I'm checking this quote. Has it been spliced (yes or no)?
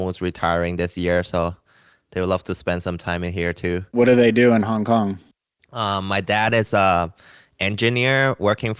no